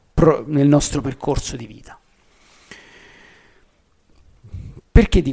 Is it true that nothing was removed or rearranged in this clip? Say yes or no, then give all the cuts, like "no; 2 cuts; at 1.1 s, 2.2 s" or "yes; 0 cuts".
yes; 0 cuts